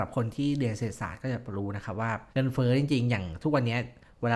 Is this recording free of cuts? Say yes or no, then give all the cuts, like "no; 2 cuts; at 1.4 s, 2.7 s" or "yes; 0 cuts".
no; 1 cut; at 2.3 s